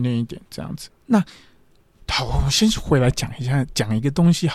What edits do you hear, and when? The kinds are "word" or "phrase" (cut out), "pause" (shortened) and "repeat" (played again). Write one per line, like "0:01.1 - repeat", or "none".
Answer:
0:01.0 - pause